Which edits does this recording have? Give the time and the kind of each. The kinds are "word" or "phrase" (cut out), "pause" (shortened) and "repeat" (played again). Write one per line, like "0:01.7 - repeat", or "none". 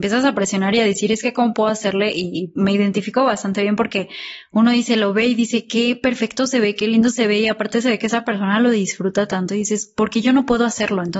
none